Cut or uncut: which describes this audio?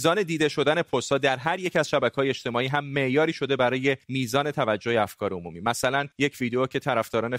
cut